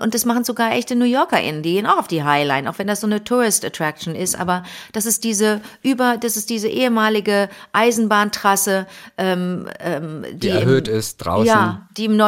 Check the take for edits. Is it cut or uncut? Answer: uncut